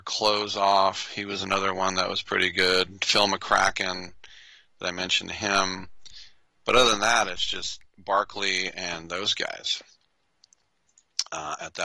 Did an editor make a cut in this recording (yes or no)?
no